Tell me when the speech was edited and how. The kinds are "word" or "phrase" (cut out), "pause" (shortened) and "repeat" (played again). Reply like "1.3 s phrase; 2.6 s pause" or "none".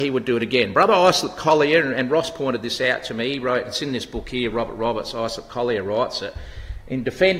none